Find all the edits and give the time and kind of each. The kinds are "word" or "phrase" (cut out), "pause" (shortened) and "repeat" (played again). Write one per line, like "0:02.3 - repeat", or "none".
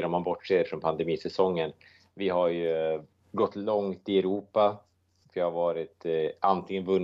none